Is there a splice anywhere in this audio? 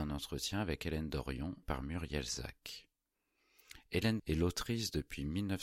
yes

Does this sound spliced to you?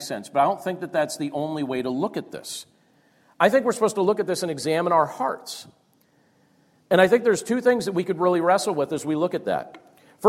no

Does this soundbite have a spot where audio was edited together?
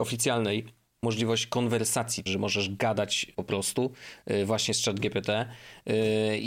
yes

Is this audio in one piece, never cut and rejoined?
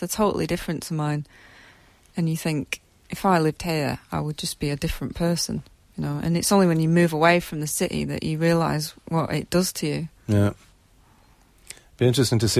yes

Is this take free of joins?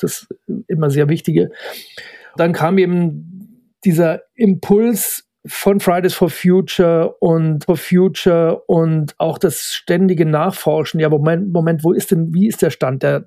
no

